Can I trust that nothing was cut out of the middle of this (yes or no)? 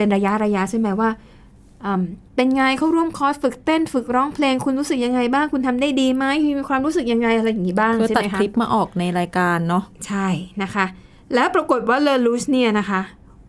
no